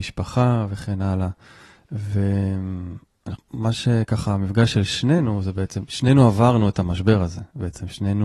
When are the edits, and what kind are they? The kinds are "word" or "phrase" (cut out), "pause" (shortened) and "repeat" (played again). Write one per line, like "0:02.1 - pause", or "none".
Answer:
0:03.4 - word